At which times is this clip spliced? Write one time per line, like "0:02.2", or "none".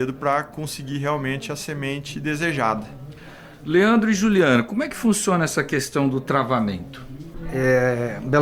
none